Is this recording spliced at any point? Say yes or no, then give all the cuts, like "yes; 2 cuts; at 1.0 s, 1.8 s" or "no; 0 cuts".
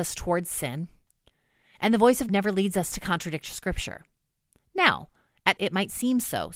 yes; 2 cuts; at 2.3 s, 5.6 s